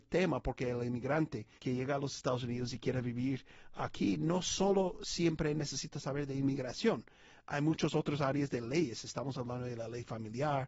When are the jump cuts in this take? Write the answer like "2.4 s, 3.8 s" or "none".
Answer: 1.6 s